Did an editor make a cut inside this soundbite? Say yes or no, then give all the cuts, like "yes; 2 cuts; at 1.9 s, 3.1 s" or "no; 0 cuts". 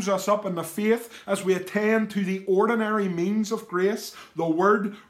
no; 0 cuts